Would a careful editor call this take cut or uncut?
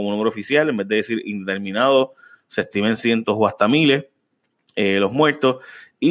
uncut